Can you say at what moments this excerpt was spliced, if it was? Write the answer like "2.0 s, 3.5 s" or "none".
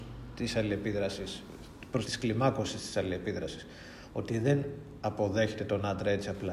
2.1 s

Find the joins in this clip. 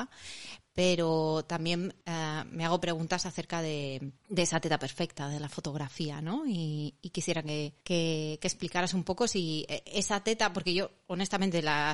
2.0 s, 4.2 s, 7.8 s

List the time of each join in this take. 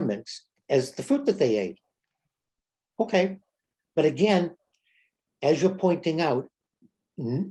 none

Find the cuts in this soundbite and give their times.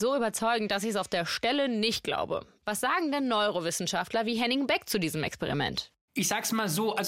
none

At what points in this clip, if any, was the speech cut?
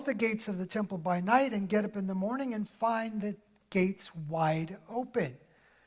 none

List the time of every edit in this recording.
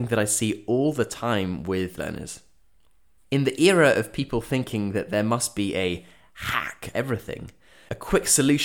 2.0 s, 6.9 s

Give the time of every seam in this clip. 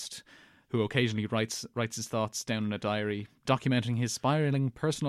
none

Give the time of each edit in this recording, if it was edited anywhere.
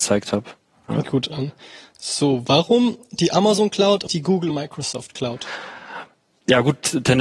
1.0 s, 4.1 s, 4.5 s

